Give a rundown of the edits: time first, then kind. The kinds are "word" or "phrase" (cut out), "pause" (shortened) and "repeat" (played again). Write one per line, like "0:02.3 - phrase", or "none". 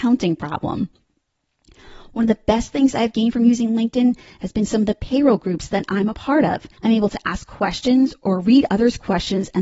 0:06.8 - pause